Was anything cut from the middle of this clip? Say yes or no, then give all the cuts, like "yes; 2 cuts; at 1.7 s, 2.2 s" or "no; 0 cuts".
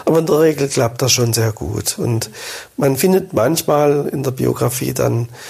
no; 0 cuts